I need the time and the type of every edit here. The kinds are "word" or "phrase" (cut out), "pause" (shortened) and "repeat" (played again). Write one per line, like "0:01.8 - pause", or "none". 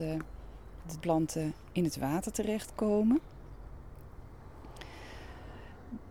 0:01.0 - word